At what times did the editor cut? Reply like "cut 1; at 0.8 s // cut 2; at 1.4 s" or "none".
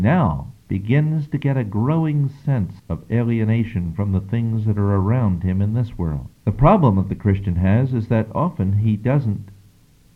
cut 1; at 2.8 s // cut 2; at 6.3 s